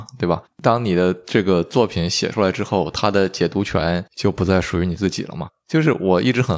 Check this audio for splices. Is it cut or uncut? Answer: cut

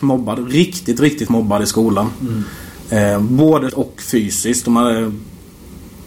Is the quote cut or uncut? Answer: cut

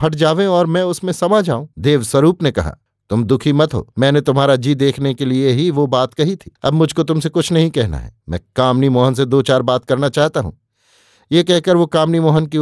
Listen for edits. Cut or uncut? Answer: cut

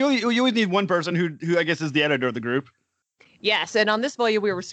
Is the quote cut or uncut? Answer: uncut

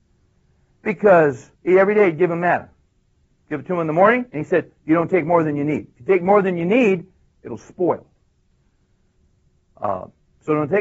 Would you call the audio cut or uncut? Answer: cut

